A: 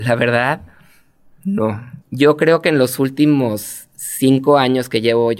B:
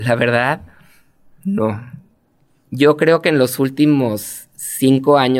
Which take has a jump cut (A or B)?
A